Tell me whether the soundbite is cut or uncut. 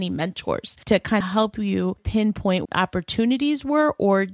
cut